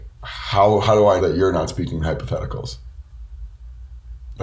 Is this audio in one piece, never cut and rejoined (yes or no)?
no